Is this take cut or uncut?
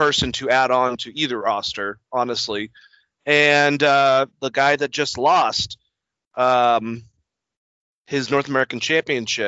uncut